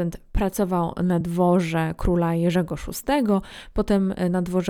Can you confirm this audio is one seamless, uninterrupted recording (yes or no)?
yes